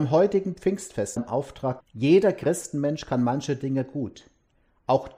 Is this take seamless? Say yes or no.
no